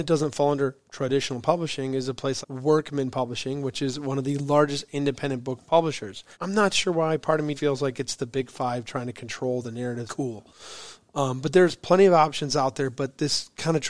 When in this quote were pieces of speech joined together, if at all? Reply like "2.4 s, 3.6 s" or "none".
2.4 s, 6.3 s, 7.6 s, 10.1 s